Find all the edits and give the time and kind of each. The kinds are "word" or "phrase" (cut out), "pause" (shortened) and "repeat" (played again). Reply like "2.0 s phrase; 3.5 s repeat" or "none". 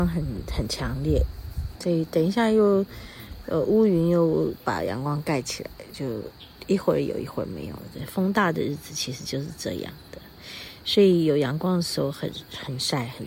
1.7 s word